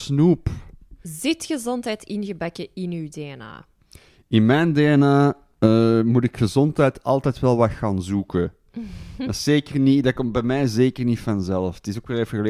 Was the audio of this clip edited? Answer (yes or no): no